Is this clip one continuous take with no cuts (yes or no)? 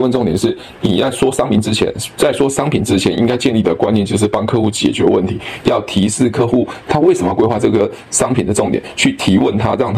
yes